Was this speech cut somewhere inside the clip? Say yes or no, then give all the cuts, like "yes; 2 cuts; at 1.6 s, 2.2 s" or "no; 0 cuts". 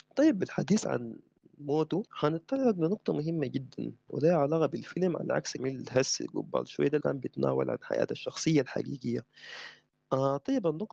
yes; 3 cuts; at 2.1 s, 5.6 s, 7.0 s